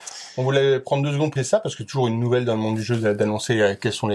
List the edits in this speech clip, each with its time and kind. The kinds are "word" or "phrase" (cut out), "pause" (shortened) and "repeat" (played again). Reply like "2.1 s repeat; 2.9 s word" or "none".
1.4 s word